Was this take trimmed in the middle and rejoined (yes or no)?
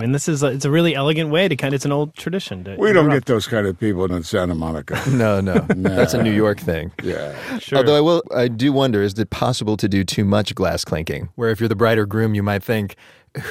yes